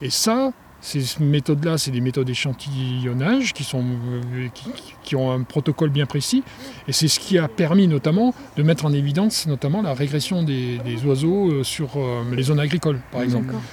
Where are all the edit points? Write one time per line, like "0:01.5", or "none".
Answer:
none